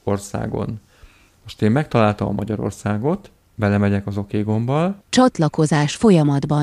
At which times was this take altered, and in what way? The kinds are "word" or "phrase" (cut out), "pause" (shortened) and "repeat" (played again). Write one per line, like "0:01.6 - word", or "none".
0:03.4 - pause
0:05.0 - pause